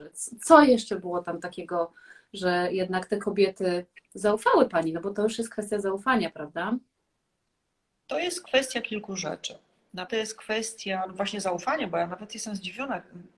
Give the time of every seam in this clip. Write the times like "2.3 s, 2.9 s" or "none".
10.1 s